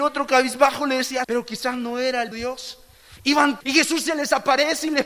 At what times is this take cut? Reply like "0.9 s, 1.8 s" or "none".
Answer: 1.2 s, 2.3 s, 3.6 s

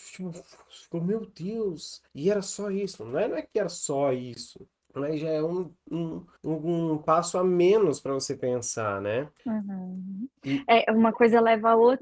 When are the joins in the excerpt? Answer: 2.1 s, 4.8 s, 6.4 s, 9.4 s

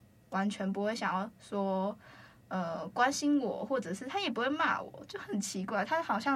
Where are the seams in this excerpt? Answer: none

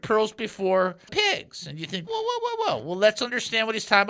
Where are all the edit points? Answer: 1.1 s, 2.1 s

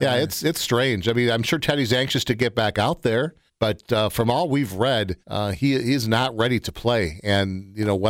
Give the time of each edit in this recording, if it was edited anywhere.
3.5 s, 5.2 s

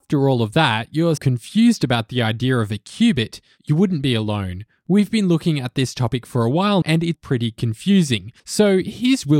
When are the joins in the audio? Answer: 1.2 s, 6.8 s, 7.1 s, 8.4 s

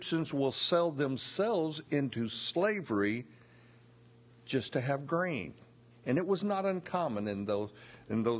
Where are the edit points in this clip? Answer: none

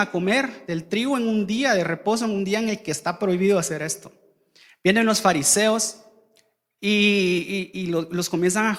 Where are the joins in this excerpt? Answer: none

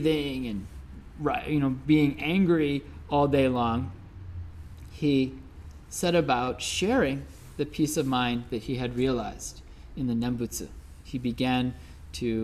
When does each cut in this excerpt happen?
none

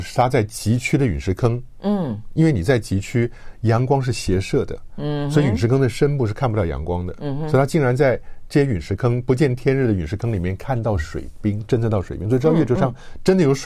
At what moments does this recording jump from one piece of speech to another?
none

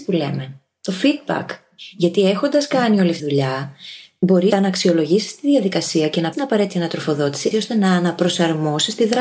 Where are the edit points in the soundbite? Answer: 3.2 s, 4.5 s, 6.3 s, 7.5 s

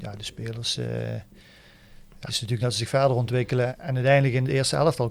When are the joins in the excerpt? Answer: 2.3 s, 2.6 s, 3.7 s

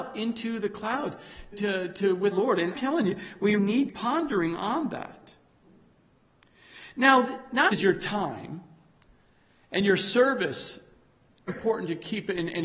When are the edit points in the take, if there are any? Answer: 1.5 s, 2.3 s, 2.7 s, 3.6 s, 3.9 s, 7.7 s, 11.5 s

